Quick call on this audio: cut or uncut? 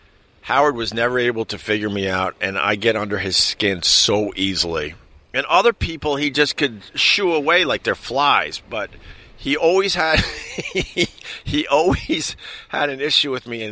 uncut